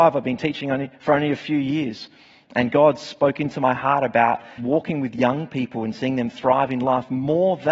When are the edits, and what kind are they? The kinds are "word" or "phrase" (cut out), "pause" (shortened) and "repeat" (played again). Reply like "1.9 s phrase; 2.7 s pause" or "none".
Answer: 4.6 s word